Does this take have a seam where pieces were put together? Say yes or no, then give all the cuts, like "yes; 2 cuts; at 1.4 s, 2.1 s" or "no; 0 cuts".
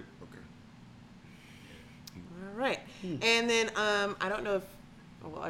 no; 0 cuts